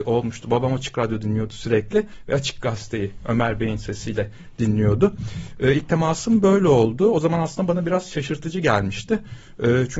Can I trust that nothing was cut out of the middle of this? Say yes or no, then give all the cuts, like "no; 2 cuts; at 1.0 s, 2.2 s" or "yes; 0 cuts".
yes; 0 cuts